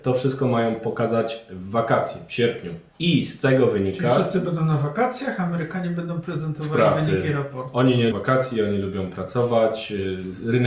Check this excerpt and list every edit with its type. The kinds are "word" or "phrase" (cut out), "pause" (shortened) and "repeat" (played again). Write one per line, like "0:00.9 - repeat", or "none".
0:02.9 - pause
0:08.1 - word